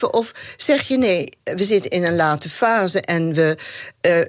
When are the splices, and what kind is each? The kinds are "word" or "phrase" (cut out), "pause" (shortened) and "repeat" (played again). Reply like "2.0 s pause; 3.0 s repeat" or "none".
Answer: none

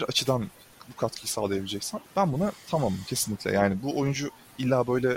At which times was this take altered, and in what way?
2.0 s pause

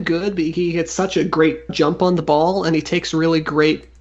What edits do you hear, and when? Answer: 1.7 s word

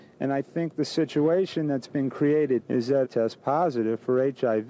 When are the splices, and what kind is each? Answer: 2.6 s word; 3.0 s phrase

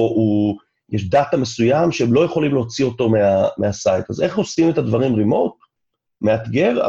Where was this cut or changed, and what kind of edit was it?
none

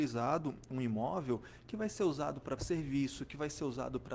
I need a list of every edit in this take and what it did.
2.6 s word

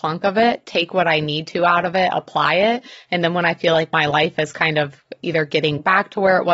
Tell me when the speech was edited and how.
none

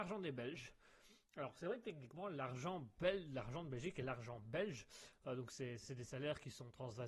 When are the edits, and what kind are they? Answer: 5.8 s word

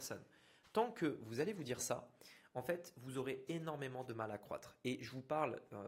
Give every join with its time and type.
none

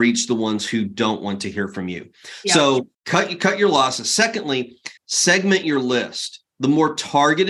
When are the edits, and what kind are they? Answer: 2.9 s pause; 5.0 s pause

